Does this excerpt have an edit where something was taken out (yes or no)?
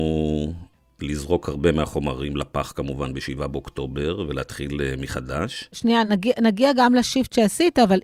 no